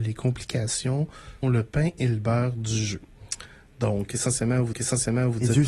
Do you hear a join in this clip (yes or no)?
yes